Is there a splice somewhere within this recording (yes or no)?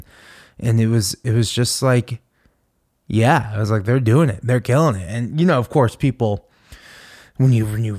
no